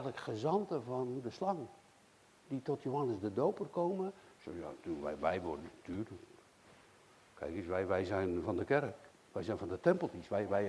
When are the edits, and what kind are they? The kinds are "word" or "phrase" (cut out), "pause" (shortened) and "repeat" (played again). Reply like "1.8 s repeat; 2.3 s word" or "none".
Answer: 9.1 s pause